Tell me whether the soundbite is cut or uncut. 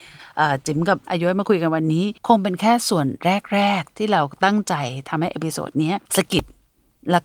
cut